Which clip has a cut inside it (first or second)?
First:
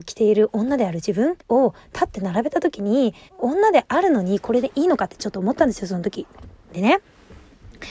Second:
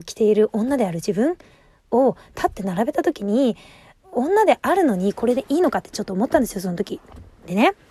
first